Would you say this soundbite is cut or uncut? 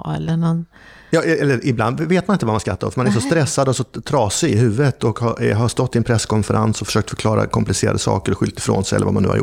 uncut